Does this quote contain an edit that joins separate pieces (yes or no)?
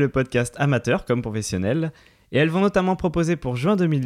no